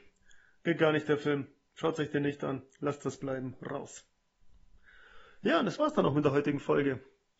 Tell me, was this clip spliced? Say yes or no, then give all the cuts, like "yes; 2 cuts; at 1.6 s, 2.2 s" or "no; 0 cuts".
no; 0 cuts